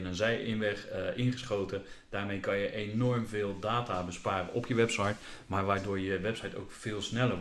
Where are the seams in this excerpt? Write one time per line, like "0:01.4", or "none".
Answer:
none